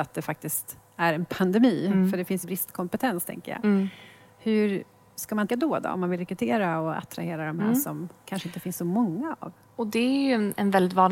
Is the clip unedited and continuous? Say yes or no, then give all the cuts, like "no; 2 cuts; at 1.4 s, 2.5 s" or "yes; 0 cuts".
no; 2 cuts; at 2.4 s, 5.5 s